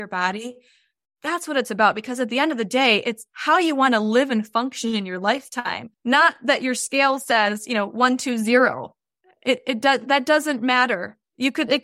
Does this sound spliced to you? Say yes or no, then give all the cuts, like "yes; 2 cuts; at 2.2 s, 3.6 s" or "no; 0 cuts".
yes; 2 cuts; at 5.9 s, 9.2 s